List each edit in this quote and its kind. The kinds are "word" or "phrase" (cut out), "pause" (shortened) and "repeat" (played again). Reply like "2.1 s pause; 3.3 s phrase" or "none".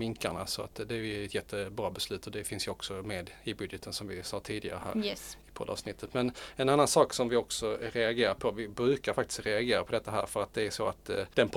none